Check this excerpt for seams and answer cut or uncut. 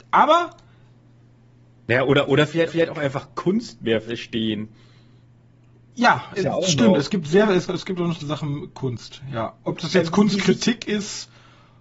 cut